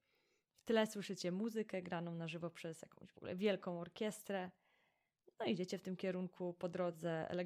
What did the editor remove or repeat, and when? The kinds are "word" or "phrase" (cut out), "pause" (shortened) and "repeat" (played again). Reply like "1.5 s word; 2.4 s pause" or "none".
none